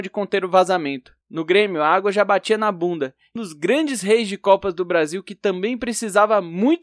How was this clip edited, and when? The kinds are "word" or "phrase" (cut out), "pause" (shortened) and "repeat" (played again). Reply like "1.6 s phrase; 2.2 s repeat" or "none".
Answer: 1.2 s pause; 3.4 s word